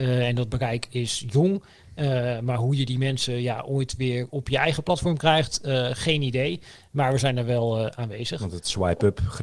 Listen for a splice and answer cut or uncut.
uncut